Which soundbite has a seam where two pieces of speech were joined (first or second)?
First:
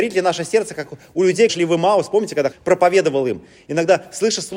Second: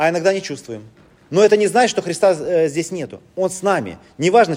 first